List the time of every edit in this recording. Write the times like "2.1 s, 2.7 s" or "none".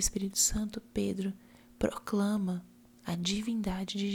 2.8 s